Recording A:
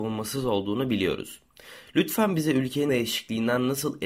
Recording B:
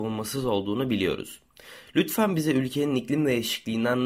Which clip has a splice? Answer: A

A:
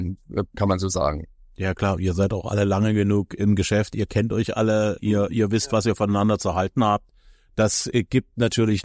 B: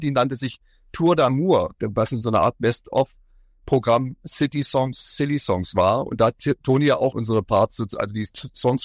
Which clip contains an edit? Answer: B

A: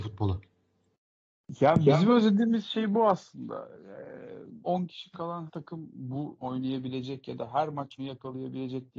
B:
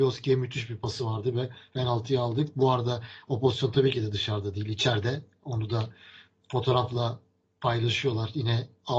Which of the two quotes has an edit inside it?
A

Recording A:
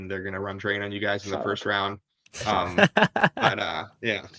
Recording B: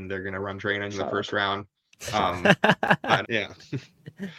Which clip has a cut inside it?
B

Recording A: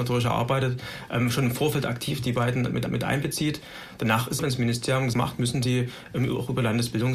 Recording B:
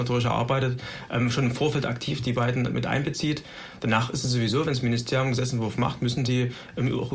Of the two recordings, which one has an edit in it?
A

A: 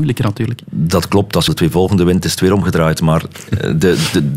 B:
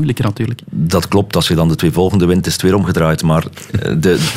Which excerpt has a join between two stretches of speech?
A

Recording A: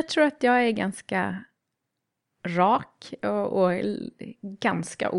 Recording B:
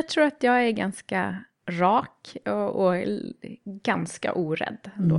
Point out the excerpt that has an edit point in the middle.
B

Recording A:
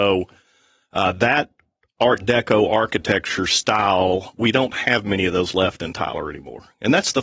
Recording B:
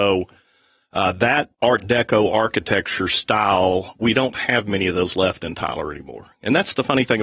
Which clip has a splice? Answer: B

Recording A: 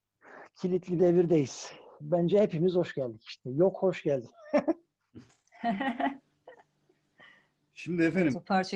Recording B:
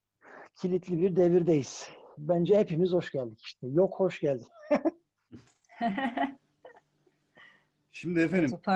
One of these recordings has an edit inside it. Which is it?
A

